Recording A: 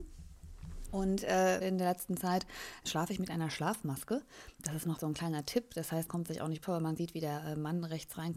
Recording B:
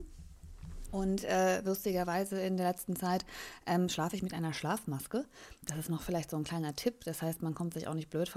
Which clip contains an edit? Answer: A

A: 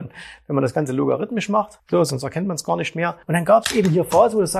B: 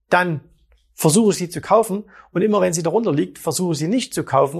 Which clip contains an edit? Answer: A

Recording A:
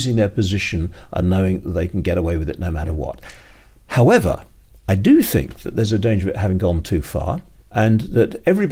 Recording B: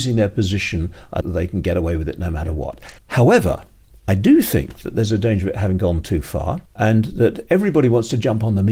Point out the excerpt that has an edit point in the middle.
B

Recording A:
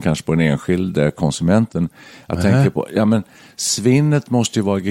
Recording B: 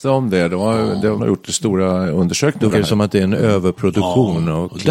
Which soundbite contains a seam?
B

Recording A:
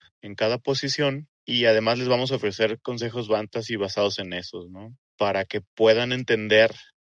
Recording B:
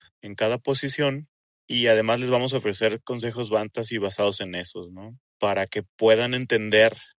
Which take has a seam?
A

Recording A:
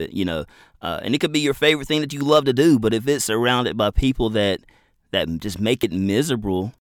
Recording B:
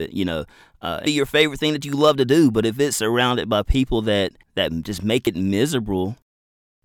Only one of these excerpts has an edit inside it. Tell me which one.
B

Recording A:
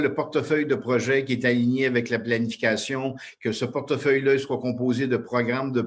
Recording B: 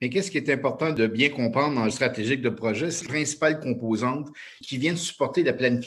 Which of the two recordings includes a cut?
B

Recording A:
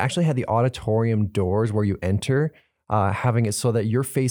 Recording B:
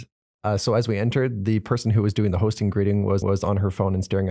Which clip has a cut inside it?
B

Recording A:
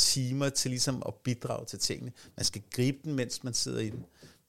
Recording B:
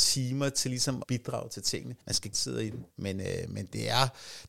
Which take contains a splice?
B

